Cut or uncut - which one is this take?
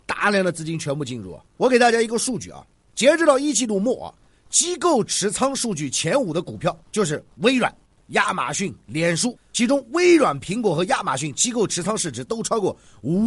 cut